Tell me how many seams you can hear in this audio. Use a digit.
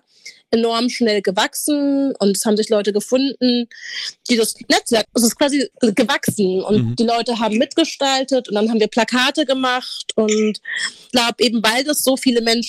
3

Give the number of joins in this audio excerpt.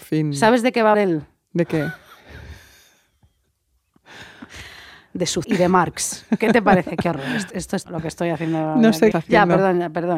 5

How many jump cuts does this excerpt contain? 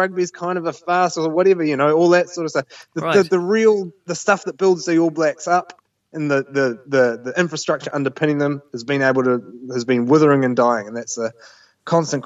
0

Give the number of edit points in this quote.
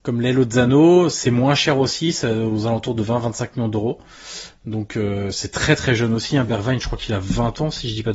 0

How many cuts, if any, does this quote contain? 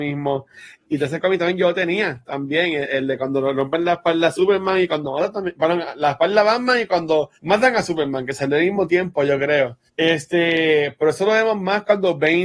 2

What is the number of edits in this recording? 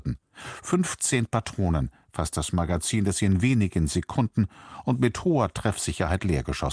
0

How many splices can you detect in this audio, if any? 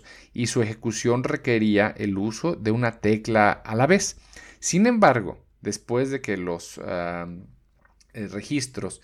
0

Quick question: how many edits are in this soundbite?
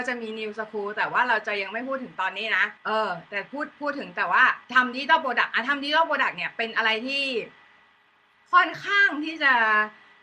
2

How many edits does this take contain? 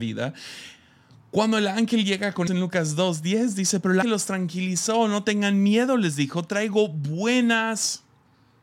2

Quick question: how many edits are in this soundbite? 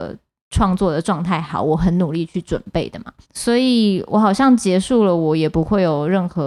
1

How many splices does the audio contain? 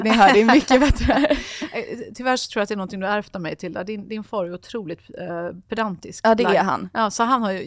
0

